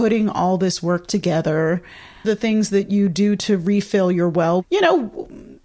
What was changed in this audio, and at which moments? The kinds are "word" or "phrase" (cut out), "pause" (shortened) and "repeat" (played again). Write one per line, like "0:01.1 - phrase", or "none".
0:02.2 - phrase